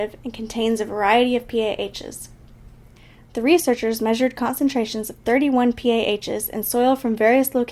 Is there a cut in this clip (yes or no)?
no